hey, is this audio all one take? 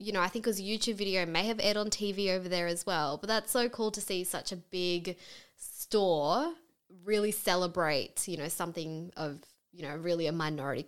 yes; 0 cuts

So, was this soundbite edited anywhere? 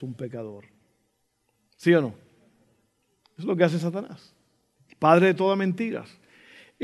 no; 0 cuts

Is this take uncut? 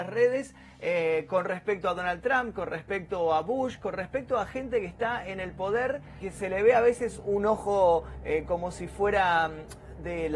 yes; 0 cuts

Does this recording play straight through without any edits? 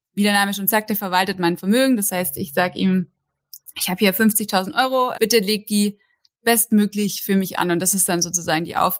no; 1 cut; at 5.1 s

